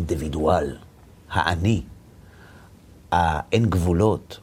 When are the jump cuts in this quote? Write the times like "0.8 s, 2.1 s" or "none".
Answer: none